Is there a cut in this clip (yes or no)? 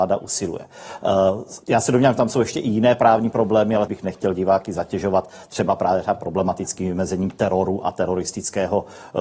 yes